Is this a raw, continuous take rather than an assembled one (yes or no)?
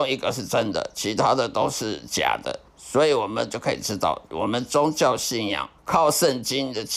no